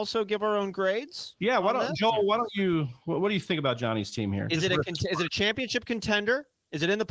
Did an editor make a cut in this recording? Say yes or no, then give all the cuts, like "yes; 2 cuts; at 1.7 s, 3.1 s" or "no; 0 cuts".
no; 0 cuts